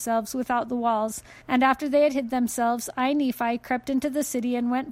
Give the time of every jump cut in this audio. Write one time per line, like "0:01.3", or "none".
0:01.4